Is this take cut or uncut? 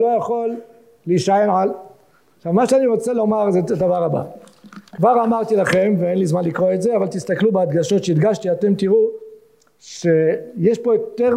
uncut